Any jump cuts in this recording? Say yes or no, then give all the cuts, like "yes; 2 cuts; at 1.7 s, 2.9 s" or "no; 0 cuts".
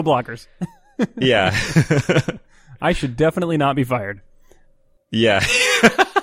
no; 0 cuts